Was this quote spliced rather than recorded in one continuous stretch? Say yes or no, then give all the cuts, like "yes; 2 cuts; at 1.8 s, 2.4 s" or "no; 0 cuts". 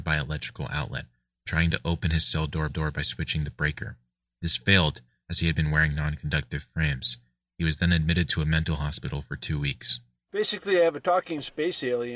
yes; 1 cut; at 2.7 s